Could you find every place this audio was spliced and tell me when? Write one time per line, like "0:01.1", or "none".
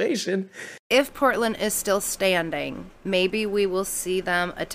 none